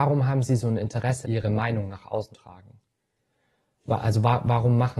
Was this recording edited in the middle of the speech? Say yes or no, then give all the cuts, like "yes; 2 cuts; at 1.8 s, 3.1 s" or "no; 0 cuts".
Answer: yes; 2 cuts; at 1.2 s, 2.3 s